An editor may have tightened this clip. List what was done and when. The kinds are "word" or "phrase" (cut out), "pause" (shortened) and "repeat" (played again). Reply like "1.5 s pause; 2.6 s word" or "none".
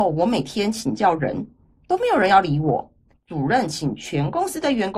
none